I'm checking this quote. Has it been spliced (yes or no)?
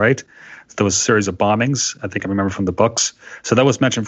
no